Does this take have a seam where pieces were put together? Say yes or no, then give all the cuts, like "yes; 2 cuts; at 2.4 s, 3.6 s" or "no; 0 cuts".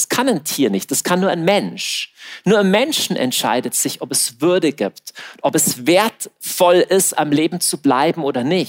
no; 0 cuts